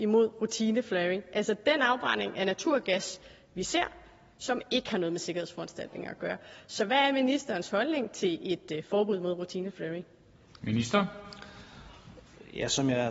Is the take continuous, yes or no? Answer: yes